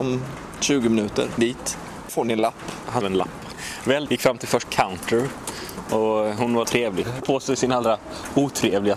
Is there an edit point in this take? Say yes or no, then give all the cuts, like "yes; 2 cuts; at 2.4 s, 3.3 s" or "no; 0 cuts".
yes; 7 cuts; at 1.4 s, 2.1 s, 3.0 s, 4.1 s, 4.7 s, 6.6 s, 7.2 s